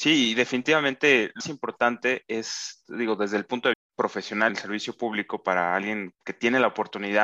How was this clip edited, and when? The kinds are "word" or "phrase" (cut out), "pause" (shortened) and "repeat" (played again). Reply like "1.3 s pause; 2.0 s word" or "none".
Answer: 1.4 s word; 3.7 s word; 4.5 s word; 6.1 s word